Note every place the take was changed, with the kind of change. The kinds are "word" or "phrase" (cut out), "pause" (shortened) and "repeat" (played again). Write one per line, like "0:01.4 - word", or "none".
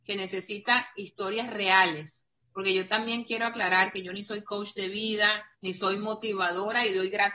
0:02.4 - pause
0:05.5 - pause

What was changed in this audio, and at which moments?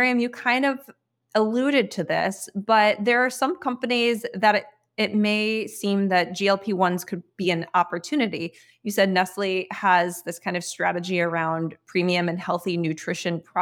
none

